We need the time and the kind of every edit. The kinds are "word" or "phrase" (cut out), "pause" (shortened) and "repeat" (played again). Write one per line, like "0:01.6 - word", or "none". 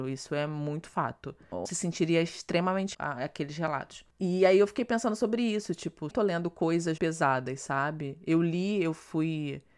0:01.7 - word
0:02.9 - phrase
0:06.1 - phrase
0:07.0 - word

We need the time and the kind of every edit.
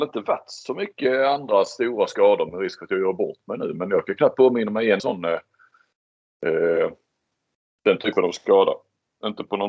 0:05.0 - word

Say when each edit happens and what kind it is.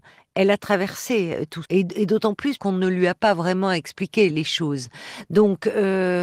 0:01.6 - word
0:02.6 - word
0:04.3 - word

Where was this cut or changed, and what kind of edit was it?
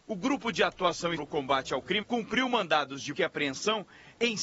0:01.2 - word
0:02.0 - word
0:03.1 - word

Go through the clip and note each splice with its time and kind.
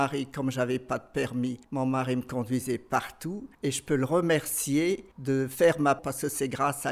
0:01.6 - pause
0:03.5 - pause
0:05.1 - pause
0:06.0 - word

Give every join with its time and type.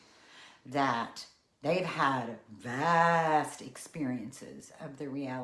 none

